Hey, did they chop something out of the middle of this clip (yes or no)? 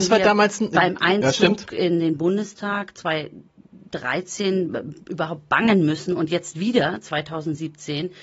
no